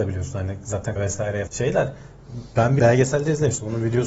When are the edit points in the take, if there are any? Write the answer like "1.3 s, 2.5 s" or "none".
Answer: 1.0 s, 1.5 s, 2.8 s